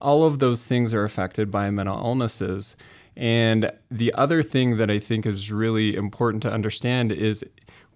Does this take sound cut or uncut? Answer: uncut